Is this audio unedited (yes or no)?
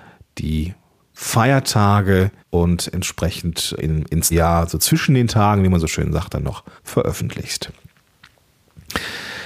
no